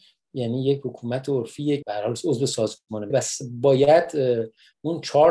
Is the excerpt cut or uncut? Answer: cut